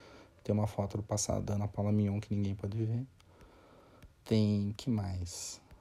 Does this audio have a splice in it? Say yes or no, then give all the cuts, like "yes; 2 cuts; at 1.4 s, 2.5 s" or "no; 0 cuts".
yes; 1 cut; at 4.1 s